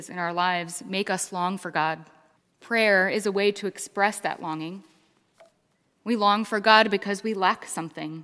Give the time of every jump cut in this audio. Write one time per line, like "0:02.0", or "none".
0:02.4